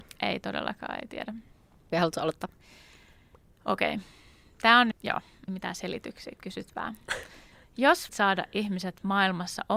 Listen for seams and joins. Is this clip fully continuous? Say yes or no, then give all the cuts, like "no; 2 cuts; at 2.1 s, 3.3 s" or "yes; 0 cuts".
no; 5 cuts; at 1.9 s, 4.9 s, 5.5 s, 6.4 s, 8.1 s